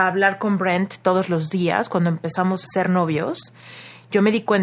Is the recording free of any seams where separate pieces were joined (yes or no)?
no